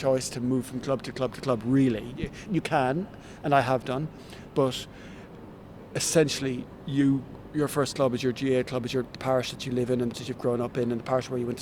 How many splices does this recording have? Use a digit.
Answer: 2